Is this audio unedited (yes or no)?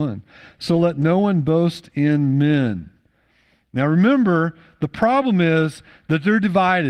yes